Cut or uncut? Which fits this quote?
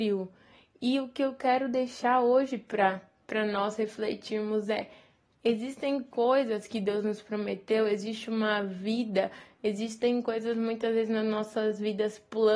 uncut